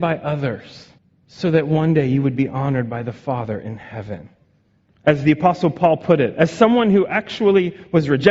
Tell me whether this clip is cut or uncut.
cut